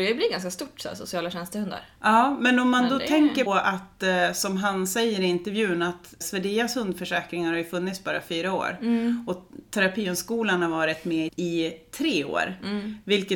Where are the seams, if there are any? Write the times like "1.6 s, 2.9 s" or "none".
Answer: 3.5 s, 6.2 s, 11.3 s